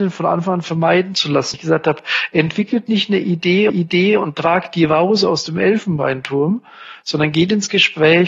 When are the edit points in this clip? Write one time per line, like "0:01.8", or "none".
0:01.5
0:03.7